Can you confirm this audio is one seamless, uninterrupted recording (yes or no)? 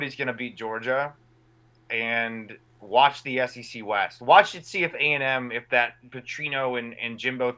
yes